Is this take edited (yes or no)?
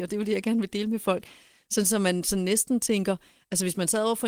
no